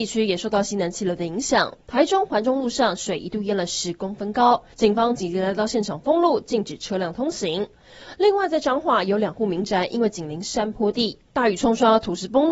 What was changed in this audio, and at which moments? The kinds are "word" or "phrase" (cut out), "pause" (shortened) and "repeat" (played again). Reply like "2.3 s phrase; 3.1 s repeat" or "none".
4.7 s pause